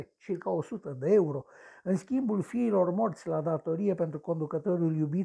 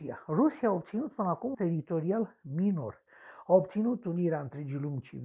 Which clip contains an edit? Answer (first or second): second